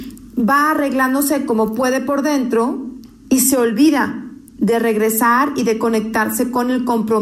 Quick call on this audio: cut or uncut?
cut